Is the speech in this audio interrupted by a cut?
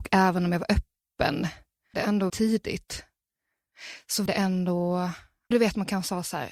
yes; 4 cuts; at 1.9 s, 2.3 s, 4.3 s, 5.5 s

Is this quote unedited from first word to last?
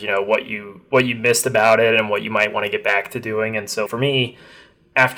no; 1 cut; at 3.9 s

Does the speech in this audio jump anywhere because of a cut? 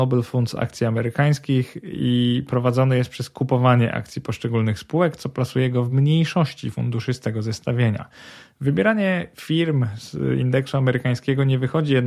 no; 0 cuts

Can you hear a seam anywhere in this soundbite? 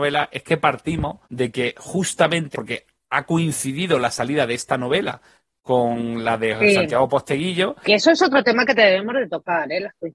yes; 2 cuts; at 1.2 s, 2.5 s

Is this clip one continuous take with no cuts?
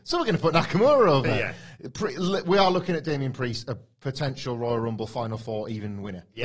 yes; 0 cuts

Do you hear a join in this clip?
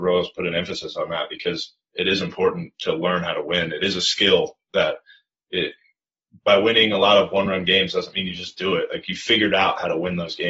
no; 0 cuts

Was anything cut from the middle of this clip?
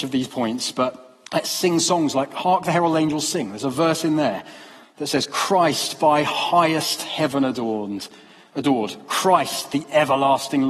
yes; 1 cut; at 1.3 s

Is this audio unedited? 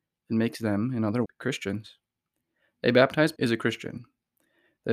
no; 2 cuts; at 1.2 s, 3.4 s

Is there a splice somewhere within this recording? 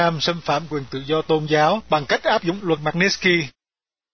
no; 0 cuts

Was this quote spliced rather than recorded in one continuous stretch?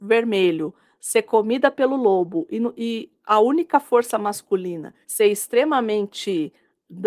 yes; 1 cut; at 5.0 s

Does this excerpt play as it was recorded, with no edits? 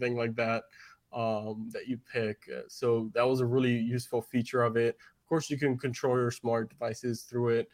yes; 0 cuts

